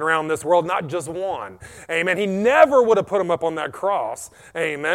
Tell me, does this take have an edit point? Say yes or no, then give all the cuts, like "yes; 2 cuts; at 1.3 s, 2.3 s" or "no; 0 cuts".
no; 0 cuts